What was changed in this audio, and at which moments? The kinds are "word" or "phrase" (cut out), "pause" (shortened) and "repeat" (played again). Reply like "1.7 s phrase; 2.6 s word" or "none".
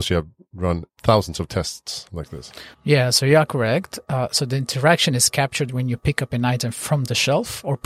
2.7 s pause